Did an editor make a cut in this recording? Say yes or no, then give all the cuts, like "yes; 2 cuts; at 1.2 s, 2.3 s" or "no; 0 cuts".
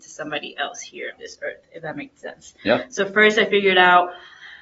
yes; 1 cut; at 1.2 s